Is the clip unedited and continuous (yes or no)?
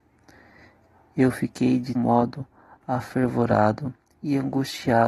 no